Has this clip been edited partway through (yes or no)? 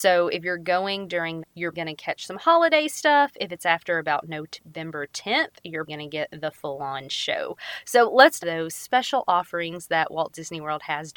yes